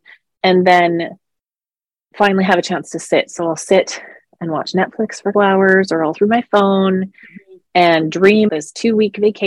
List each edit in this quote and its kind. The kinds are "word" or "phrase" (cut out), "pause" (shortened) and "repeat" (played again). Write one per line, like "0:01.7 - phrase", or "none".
0:05.3 - word
0:06.1 - word
0:08.5 - word